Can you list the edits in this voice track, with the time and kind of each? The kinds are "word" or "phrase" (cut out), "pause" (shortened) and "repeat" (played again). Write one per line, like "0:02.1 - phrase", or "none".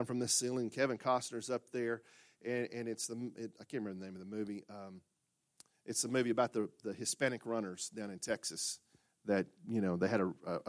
none